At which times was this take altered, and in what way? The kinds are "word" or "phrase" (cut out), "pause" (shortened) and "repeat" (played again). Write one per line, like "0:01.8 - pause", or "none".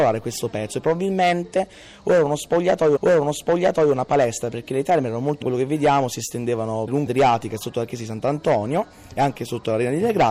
0:03.0 - repeat
0:05.4 - phrase
0:07.1 - word

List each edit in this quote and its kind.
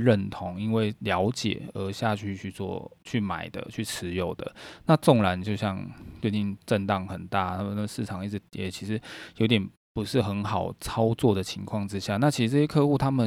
0:03.0 - pause

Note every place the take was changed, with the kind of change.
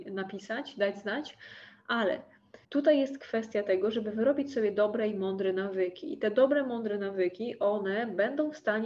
0:02.6 - pause

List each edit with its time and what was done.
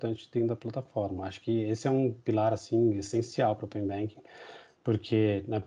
none

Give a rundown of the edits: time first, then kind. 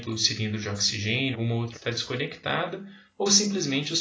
0:01.3 - word
0:01.7 - word

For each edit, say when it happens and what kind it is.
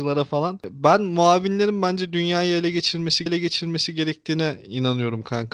0:03.3 - repeat

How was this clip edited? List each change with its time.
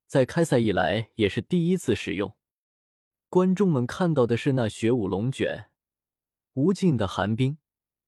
none

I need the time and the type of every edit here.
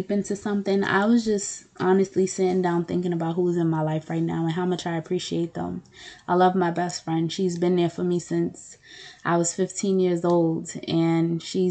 none

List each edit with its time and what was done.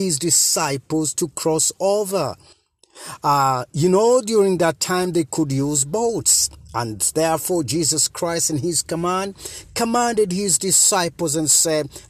none

